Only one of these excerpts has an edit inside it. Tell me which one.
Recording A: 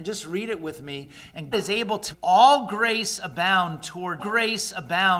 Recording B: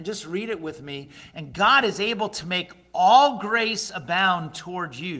A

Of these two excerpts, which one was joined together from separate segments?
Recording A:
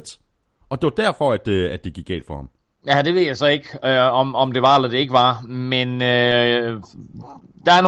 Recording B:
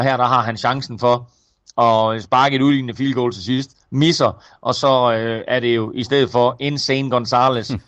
A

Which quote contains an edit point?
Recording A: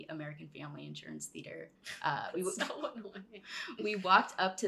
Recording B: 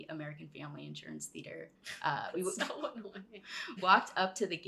B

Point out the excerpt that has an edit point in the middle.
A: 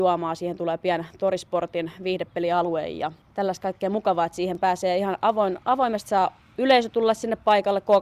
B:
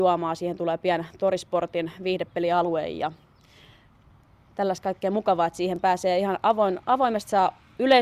A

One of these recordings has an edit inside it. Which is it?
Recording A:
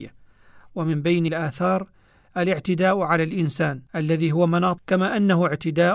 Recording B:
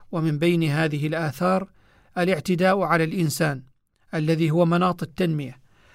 A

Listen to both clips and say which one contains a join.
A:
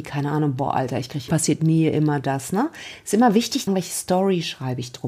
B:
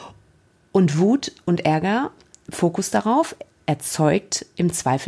A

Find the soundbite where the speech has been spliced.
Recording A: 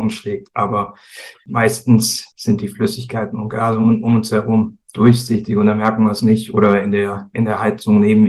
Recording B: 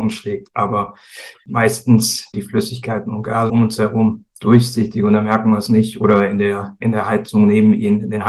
B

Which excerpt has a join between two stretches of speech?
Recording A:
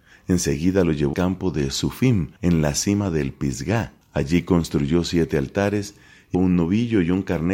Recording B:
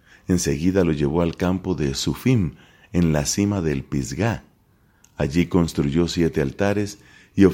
A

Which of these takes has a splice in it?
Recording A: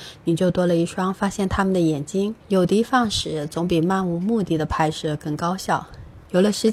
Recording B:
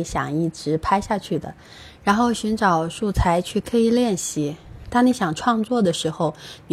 A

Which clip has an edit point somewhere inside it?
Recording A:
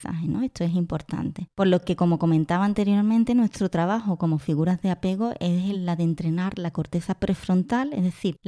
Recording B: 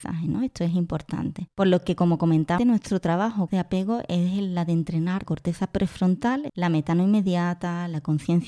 B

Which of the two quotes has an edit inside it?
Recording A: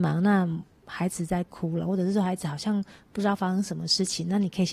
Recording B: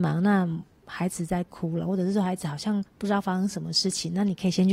B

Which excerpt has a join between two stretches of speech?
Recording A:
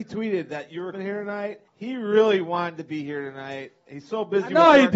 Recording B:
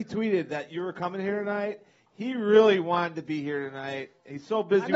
A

